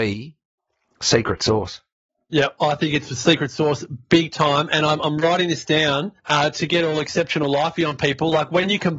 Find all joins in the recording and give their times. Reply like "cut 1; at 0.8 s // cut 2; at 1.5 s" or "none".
cut 1; at 6.2 s

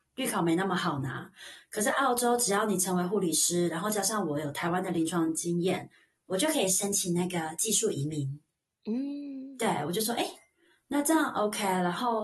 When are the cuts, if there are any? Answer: none

